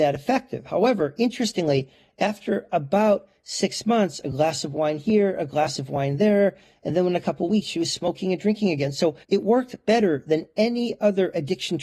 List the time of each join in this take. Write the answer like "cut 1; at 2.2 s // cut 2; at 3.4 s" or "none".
cut 1; at 9.2 s